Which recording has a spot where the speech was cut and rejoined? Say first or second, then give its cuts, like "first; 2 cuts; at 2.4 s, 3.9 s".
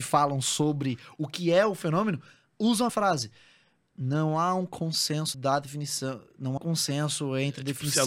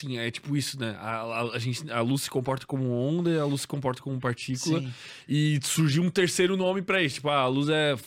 first; 3 cuts; at 2.9 s, 5.3 s, 6.6 s